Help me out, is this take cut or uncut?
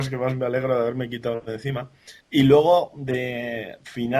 cut